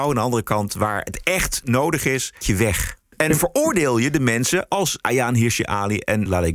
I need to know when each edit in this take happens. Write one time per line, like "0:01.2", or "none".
0:02.4